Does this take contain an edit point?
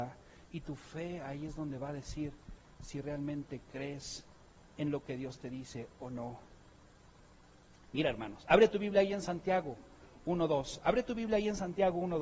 no; 0 cuts

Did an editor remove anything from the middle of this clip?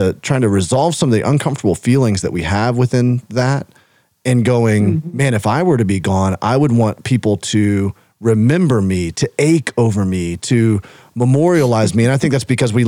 no; 0 cuts

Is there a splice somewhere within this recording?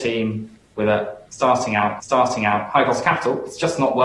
yes; 1 cut; at 2.0 s

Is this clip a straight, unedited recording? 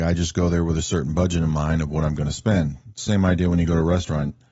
yes; 0 cuts

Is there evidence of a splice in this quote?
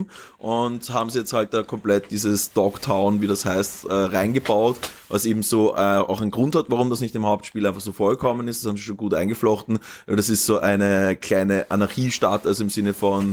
no; 0 cuts

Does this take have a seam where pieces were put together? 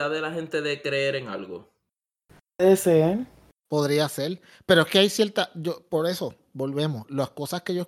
no; 0 cuts

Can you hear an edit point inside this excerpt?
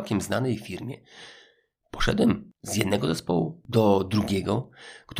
no; 0 cuts

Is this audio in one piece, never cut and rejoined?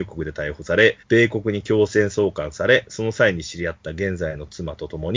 no; 1 cut; at 1.0 s

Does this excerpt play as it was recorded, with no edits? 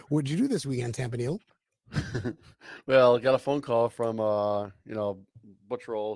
yes; 0 cuts

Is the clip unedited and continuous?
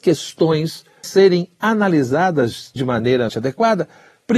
no; 3 cuts; at 1.0 s, 2.8 s, 3.3 s

